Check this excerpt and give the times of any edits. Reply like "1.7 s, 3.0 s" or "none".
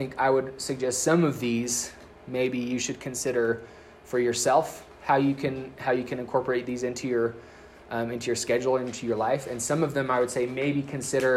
none